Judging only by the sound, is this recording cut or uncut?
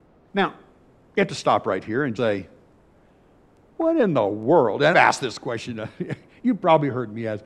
cut